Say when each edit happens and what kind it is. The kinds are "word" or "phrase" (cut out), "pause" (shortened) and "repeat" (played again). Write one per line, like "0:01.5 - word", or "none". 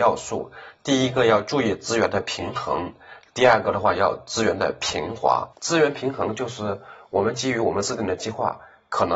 0:05.5 - pause